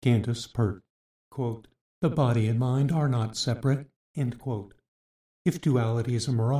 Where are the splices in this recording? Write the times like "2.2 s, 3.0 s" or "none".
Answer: none